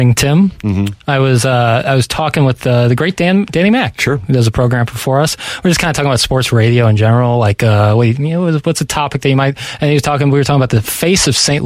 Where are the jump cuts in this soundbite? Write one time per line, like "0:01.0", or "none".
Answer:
none